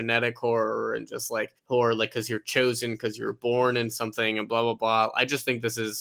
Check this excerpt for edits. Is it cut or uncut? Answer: cut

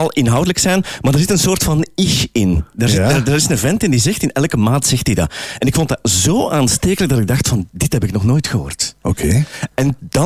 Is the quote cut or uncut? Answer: uncut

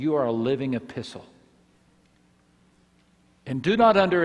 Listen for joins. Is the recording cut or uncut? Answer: uncut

